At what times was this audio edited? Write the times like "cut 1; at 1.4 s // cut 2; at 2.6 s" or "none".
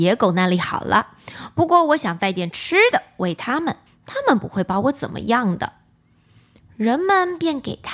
cut 1; at 3.9 s